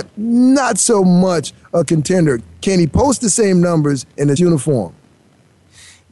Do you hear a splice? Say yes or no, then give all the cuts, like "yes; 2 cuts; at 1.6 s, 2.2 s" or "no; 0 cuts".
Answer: yes; 1 cut; at 4.4 s